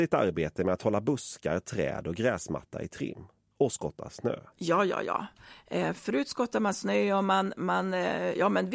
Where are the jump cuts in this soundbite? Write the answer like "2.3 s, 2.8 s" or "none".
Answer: 3.5 s, 4.5 s